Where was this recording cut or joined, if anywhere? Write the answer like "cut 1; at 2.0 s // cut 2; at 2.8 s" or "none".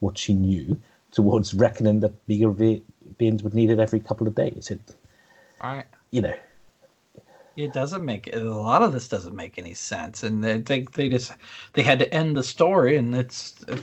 none